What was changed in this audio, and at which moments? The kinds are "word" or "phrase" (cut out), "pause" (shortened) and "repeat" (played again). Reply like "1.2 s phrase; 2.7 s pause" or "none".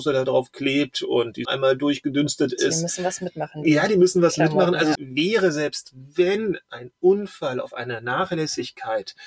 1.4 s word; 4.9 s word

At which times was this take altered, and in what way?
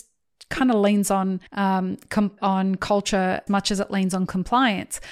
1.5 s pause; 2.4 s word; 3.5 s word

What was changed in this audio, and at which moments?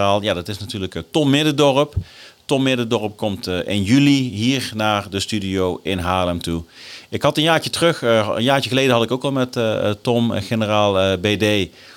none

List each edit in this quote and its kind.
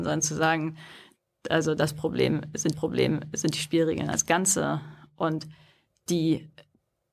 2.7 s repeat

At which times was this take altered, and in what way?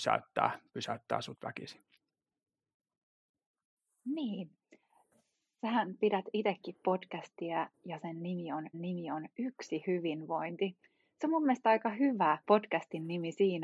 7.7 s pause; 8.7 s repeat; 12.4 s pause

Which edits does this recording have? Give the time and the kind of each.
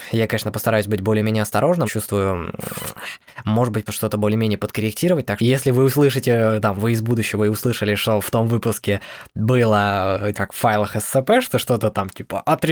1.9 s word; 3.9 s word; 5.4 s word; 10.3 s word

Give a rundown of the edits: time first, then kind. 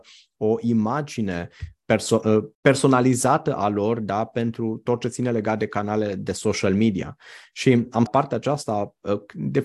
2.5 s pause; 8.1 s phrase

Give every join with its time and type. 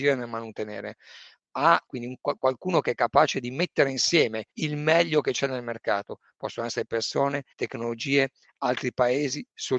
1.9 s phrase; 4.5 s pause; 7.5 s pause

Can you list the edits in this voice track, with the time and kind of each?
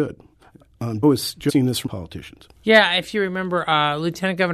1.0 s word; 1.5 s word; 1.9 s word; 2.6 s pause

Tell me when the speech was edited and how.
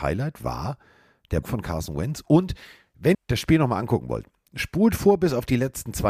1.4 s word; 3.1 s phrase

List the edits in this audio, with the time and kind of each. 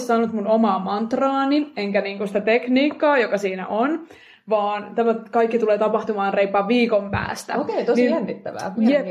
none

